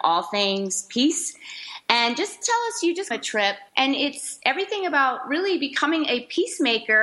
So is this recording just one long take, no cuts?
no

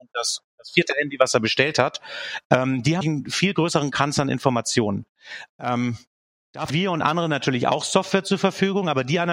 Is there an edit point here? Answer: yes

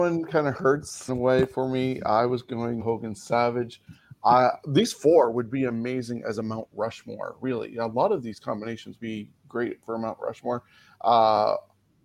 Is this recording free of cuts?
no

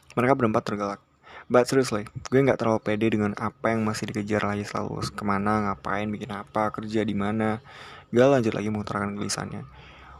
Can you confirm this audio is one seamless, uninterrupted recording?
yes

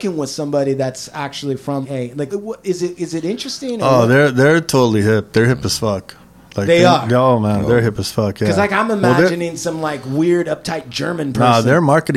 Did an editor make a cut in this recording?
yes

